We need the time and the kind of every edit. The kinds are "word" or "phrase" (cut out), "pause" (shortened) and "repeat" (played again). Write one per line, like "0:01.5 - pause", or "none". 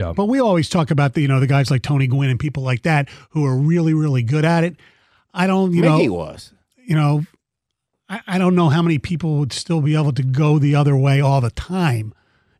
none